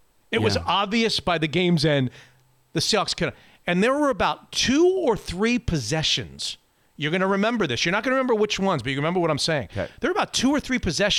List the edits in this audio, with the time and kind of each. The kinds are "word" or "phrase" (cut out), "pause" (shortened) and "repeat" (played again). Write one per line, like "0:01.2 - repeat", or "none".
none